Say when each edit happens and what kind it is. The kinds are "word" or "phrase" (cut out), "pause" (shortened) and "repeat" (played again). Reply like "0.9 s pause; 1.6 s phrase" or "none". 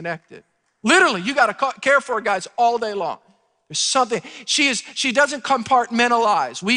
none